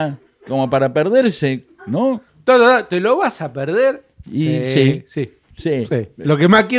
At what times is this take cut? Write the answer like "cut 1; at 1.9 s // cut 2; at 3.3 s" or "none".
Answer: none